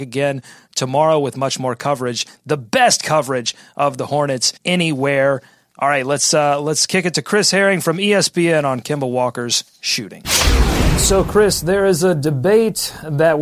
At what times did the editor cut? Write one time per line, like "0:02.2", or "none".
0:04.6